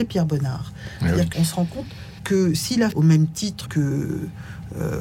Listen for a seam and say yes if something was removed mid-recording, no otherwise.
yes